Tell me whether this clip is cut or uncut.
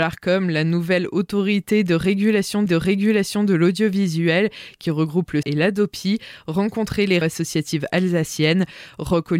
cut